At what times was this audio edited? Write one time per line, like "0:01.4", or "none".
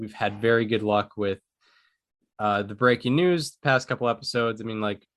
none